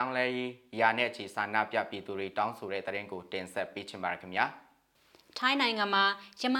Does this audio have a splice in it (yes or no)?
no